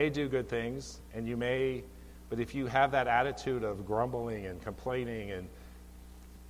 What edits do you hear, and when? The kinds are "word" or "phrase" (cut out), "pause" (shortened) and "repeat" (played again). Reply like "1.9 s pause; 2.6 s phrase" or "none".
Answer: none